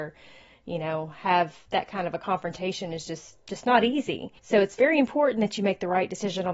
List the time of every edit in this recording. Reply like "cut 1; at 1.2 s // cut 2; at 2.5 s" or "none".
cut 1; at 3.4 s // cut 2; at 4.4 s